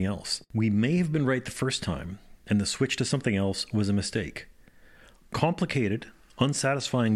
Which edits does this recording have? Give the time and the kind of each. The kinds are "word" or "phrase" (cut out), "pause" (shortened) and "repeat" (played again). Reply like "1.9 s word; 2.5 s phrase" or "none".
none